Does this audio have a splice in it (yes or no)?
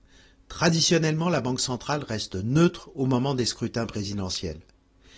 no